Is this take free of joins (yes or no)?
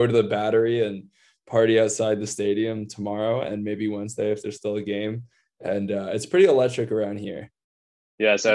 yes